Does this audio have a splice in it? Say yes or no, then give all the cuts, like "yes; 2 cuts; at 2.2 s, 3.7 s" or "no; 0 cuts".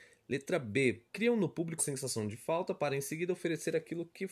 yes; 2 cuts; at 1.1 s, 1.8 s